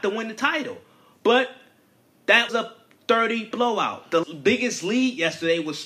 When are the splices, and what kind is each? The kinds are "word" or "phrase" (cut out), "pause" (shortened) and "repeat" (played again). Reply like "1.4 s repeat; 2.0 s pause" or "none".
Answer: 2.5 s word; 3.5 s word; 4.2 s word